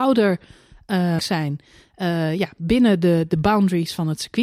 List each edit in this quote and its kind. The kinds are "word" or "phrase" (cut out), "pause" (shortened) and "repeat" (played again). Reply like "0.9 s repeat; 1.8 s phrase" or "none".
1.2 s phrase